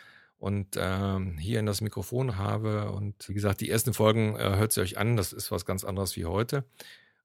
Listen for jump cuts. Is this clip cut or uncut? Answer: cut